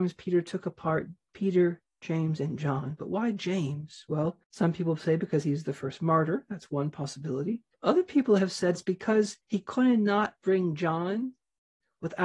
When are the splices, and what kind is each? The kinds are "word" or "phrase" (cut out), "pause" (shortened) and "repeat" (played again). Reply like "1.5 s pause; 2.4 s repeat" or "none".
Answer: 4.4 s pause; 7.7 s pause; 8.7 s word; 9.4 s pause